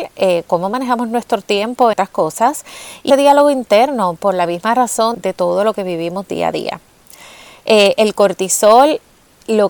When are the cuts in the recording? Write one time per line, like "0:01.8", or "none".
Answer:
0:01.9
0:03.1
0:04.2
0:05.1